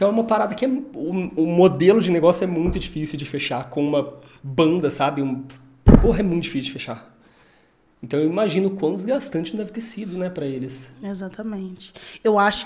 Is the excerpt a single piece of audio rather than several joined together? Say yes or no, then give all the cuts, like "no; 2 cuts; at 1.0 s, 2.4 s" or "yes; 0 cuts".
yes; 0 cuts